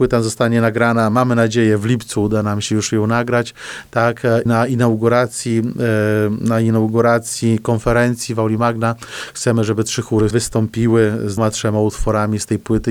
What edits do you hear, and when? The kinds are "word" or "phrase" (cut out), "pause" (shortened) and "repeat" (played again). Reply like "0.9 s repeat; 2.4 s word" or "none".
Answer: 4.5 s word; 10.3 s word; 11.4 s word